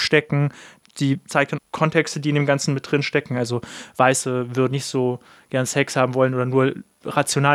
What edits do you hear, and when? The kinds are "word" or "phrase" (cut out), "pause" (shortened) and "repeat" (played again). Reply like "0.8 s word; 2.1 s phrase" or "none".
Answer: 1.6 s phrase; 4.7 s word